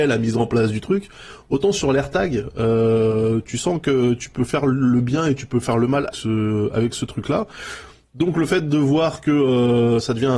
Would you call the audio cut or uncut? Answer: cut